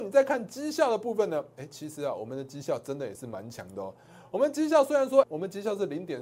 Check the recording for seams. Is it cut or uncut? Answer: cut